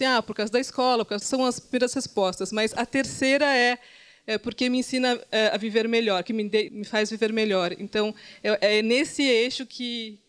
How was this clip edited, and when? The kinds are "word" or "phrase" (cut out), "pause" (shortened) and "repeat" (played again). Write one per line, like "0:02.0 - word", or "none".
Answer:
0:01.2 - phrase
0:06.7 - word